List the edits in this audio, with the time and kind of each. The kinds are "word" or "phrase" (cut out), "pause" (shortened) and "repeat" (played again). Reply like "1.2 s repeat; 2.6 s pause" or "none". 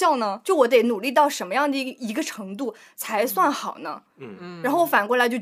4.1 s pause